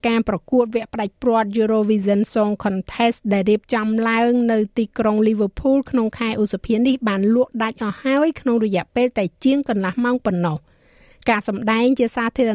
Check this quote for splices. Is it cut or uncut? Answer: uncut